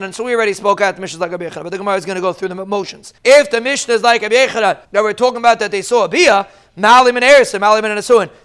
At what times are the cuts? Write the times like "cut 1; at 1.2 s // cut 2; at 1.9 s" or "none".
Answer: cut 1; at 3.2 s // cut 2; at 4.8 s